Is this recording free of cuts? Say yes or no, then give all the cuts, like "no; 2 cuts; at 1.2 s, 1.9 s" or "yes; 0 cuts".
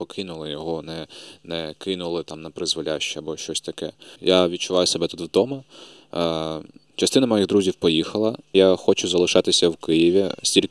yes; 0 cuts